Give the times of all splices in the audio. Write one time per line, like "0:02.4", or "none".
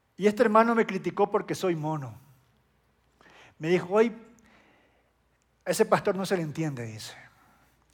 none